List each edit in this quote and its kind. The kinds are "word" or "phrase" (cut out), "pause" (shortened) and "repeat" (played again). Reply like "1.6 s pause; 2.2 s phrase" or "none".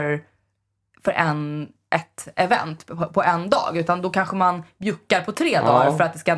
none